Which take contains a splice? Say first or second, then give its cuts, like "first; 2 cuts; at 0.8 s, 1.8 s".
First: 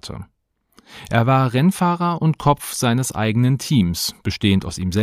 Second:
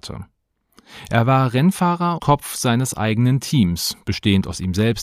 second; 1 cut; at 2.2 s